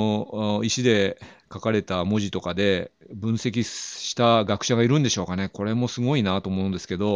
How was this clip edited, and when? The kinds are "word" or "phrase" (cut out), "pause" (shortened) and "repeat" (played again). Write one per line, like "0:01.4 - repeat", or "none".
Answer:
none